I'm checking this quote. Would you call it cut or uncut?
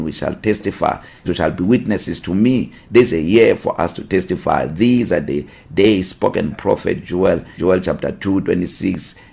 cut